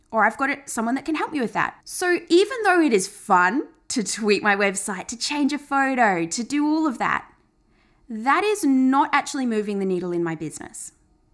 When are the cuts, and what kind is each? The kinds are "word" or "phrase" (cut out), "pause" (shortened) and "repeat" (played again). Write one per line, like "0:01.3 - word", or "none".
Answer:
0:01.8 - pause